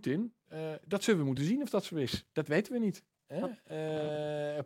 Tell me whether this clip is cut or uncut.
uncut